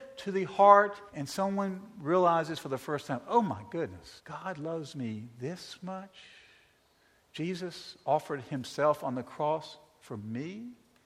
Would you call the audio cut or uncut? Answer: cut